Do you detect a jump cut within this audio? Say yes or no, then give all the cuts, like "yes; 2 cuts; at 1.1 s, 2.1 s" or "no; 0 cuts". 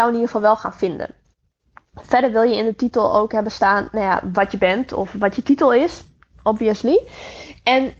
no; 0 cuts